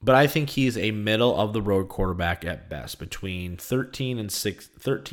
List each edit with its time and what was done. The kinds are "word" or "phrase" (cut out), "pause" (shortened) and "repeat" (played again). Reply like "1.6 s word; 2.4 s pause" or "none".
none

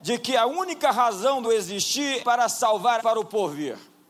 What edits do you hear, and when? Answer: 1.4 s word; 2.2 s word; 3.0 s word

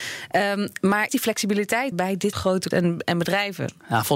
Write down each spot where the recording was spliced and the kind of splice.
1.1 s word; 1.9 s word; 2.3 s word; 2.7 s word

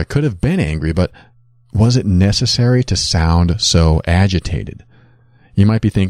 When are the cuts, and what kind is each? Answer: none

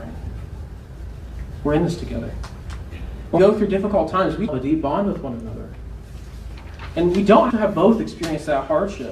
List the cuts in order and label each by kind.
3.4 s word; 4.5 s word; 7.5 s word

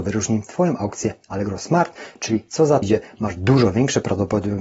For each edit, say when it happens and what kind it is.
2.8 s word

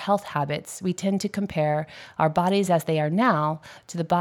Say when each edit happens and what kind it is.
none

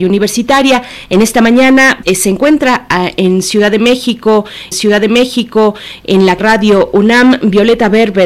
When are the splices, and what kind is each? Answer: 2.0 s word; 4.7 s repeat; 6.4 s phrase

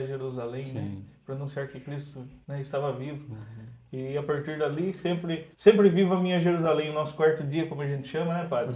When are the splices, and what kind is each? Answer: 2.4 s pause; 5.5 s pause

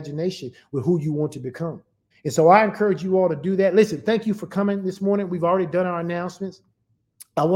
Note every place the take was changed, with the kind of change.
2.1 s pause

